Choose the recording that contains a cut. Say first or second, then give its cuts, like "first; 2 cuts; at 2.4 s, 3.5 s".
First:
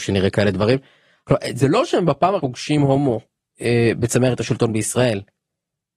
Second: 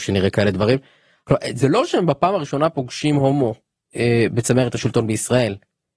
first; 1 cut; at 2.4 s